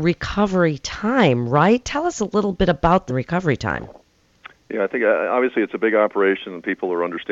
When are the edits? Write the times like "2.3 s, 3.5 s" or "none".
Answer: 3.1 s